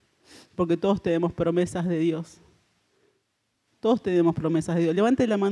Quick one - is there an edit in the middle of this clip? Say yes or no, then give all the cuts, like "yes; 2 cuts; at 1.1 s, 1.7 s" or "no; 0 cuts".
no; 0 cuts